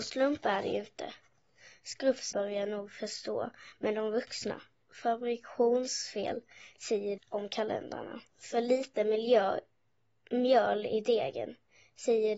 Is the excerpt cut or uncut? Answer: cut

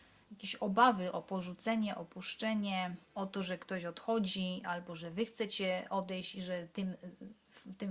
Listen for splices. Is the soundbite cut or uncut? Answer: cut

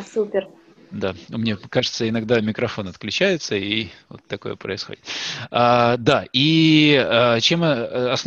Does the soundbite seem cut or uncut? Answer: uncut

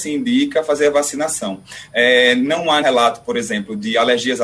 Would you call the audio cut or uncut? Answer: cut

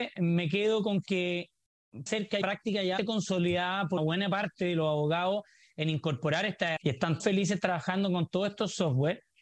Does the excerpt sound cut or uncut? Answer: cut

